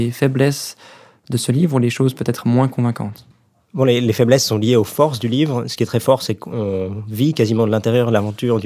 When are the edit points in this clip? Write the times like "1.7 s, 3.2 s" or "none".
none